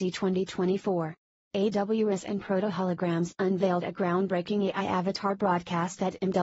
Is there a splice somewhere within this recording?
no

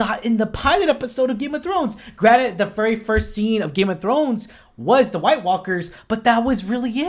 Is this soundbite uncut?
yes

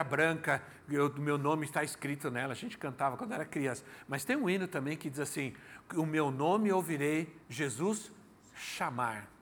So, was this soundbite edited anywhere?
yes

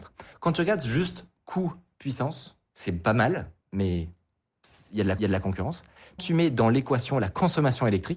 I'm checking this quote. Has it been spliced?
yes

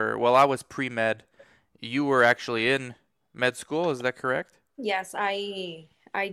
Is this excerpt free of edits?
yes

